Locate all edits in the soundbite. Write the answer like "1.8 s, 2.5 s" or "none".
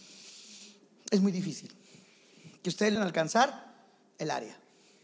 3.0 s